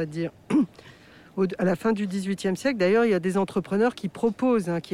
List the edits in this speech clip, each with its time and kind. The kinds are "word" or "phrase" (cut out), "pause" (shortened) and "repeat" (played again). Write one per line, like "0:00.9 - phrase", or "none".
none